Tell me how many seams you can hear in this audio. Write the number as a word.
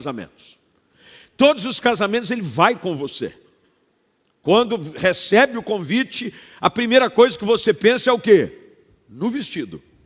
zero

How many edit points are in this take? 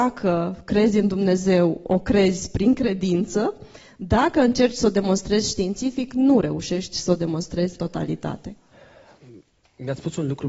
one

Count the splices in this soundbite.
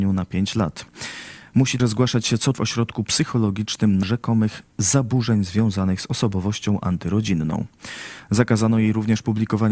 three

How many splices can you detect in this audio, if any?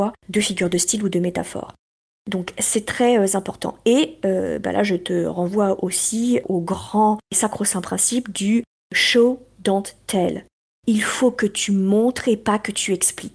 zero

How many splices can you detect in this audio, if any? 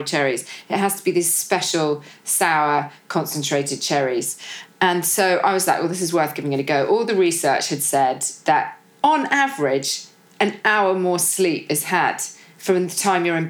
zero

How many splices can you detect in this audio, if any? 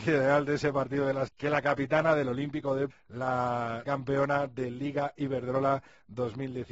three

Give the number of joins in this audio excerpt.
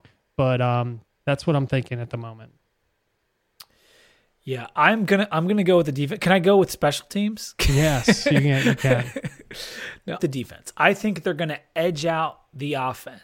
two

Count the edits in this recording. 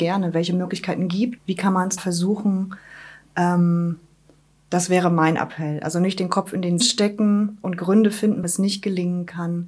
four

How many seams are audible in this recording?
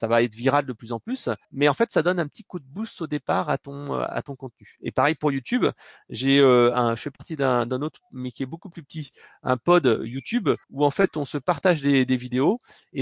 two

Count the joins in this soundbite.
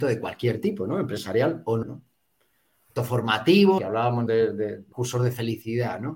five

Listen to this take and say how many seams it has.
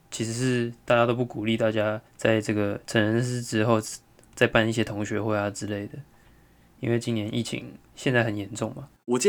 two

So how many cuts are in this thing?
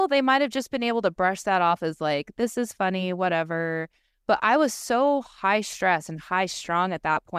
zero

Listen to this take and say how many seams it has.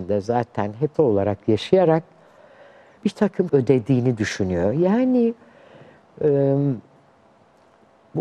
three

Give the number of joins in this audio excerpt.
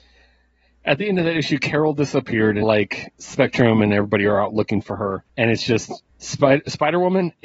three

